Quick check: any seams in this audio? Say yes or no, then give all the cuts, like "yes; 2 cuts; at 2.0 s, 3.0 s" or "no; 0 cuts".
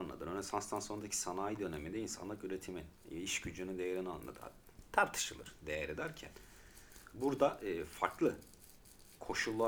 no; 0 cuts